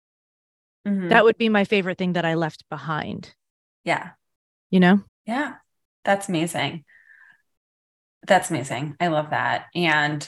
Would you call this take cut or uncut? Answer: cut